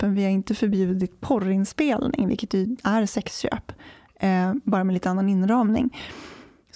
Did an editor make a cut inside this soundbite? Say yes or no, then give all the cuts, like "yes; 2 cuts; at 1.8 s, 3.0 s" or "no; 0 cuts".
no; 0 cuts